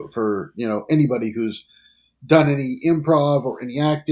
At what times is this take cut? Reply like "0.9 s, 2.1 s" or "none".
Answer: none